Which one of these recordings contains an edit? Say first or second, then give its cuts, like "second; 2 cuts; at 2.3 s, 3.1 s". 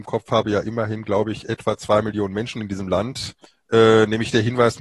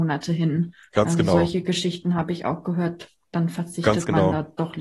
first; 1 cut; at 3.5 s